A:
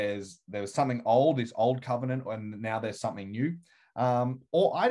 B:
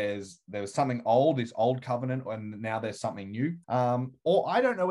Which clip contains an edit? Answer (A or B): B